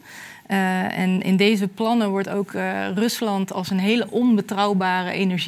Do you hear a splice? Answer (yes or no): no